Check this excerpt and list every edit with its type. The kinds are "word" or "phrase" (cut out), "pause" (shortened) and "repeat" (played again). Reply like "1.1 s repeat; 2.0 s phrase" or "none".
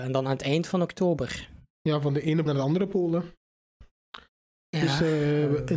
2.5 s word

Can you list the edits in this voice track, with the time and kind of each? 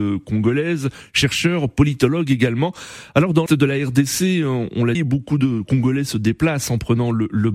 3.5 s word; 4.9 s word

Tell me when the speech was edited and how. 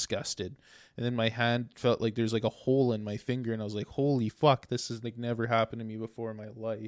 none

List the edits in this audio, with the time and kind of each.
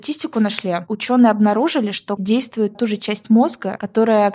2.2 s word; 2.7 s word

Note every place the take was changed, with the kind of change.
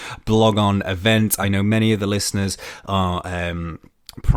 none

